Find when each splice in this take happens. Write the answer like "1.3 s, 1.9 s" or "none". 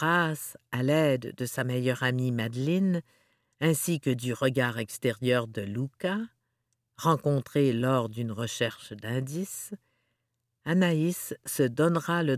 none

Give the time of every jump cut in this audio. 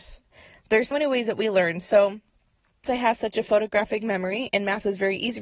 0.9 s, 2.8 s

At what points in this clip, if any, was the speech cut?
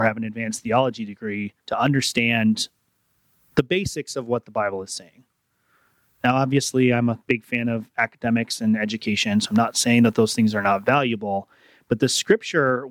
1.6 s

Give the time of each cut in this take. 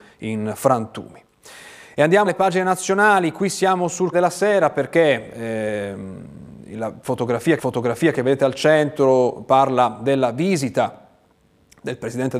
2.3 s, 4.1 s, 7.6 s

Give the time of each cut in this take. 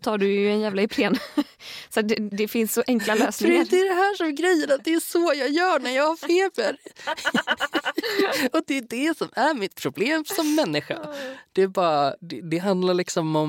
2.3 s, 12.2 s

